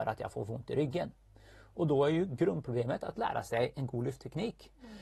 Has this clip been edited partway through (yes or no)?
no